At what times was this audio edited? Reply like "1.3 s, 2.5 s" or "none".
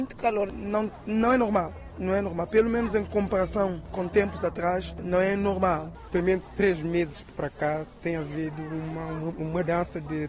none